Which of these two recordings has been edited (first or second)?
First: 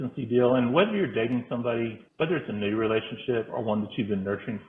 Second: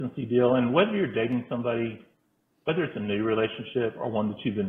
first